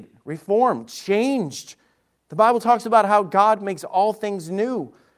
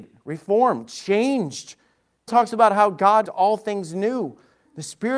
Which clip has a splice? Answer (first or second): second